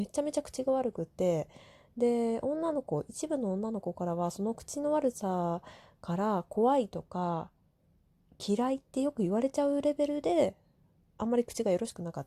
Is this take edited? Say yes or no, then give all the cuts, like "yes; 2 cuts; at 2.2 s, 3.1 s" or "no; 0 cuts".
no; 0 cuts